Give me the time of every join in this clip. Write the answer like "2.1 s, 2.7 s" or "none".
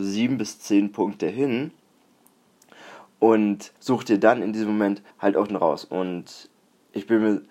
3.8 s, 5.1 s, 5.5 s

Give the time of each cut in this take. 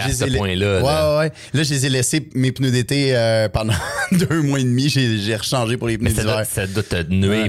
none

